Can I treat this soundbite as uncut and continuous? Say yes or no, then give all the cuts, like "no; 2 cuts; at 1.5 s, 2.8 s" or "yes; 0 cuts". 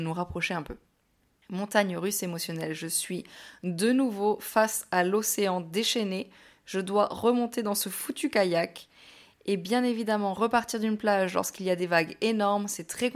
yes; 0 cuts